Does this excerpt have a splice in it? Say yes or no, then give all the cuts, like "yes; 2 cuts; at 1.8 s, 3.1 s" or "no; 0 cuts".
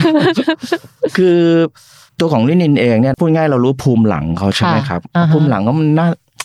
no; 0 cuts